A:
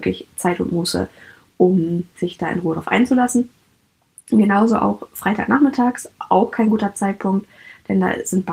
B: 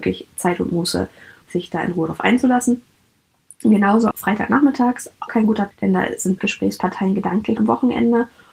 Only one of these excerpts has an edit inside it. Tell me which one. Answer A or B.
B